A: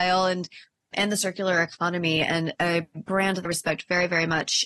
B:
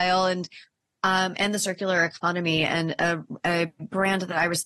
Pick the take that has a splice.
A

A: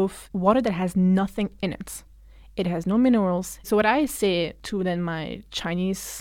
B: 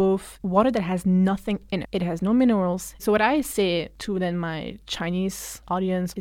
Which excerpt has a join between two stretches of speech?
B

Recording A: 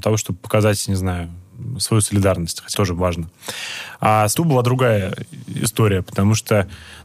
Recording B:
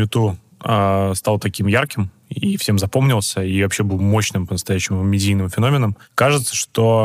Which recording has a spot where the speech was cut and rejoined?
A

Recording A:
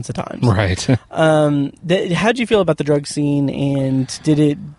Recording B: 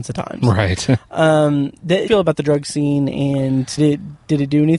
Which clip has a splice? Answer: B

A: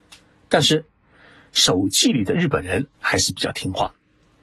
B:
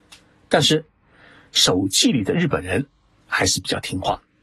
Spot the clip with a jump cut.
A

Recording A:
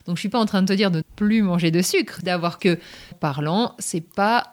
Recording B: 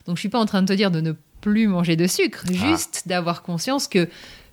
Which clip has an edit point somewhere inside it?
A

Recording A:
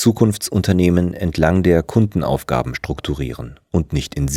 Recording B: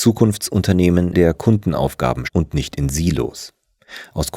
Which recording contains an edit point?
B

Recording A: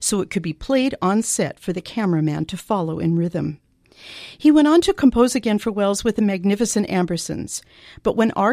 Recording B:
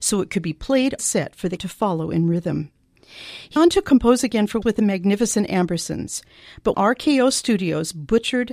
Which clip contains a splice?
B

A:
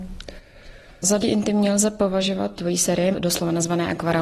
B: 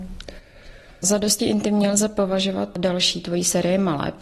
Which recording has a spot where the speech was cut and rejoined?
A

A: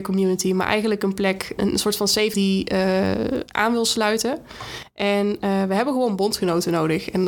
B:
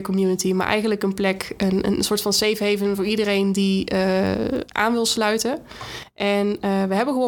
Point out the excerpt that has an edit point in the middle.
A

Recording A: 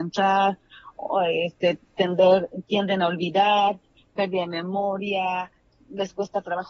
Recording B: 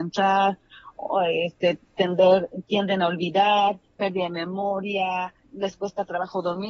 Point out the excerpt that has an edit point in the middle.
B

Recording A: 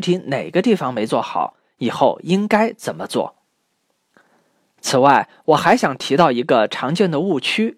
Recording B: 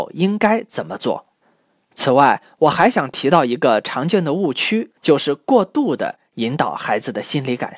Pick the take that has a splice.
B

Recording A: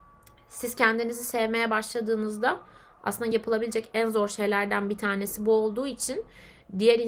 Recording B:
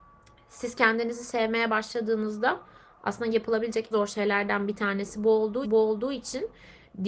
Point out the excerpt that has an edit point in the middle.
B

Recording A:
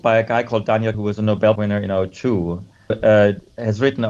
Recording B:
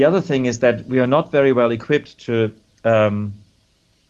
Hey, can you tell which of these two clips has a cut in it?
A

